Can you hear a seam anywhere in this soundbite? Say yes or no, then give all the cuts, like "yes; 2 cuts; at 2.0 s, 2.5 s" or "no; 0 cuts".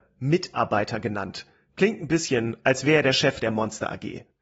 no; 0 cuts